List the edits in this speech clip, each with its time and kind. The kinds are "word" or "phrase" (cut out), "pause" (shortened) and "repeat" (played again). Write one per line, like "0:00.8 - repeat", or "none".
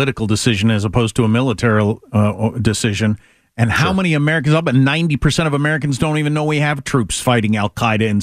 none